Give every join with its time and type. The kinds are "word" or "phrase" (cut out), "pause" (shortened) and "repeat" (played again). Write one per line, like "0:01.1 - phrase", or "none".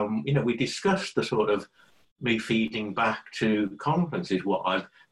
none